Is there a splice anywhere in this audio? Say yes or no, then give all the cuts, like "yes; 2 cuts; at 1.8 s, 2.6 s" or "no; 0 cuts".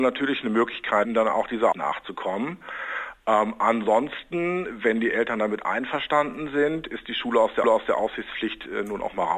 yes; 3 cuts; at 1.0 s, 1.7 s, 7.6 s